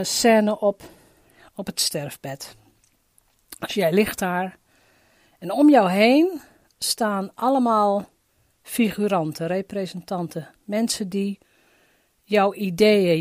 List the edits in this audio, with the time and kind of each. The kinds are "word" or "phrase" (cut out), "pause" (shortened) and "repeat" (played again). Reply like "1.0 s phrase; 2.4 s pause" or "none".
8.3 s pause